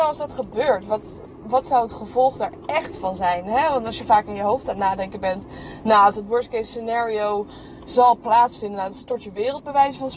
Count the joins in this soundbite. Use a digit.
0